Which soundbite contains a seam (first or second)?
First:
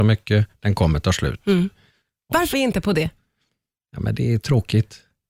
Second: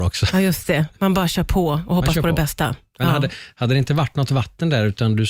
first